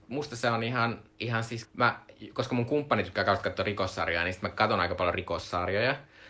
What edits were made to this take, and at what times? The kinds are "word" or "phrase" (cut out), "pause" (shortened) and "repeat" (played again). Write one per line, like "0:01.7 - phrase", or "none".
0:01.1 - pause
0:01.6 - word